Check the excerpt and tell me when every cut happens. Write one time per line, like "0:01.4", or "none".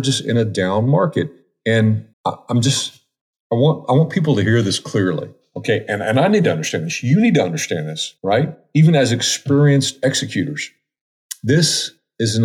0:02.1
0:08.2